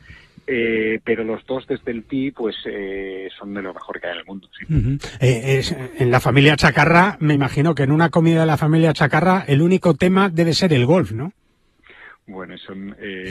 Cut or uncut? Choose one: uncut